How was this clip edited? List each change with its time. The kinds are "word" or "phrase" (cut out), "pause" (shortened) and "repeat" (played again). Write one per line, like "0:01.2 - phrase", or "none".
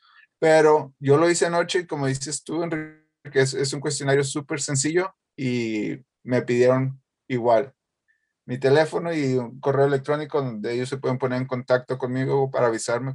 none